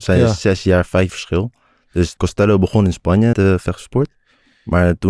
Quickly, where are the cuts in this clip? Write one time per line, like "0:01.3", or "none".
0:01.1
0:02.2
0:03.3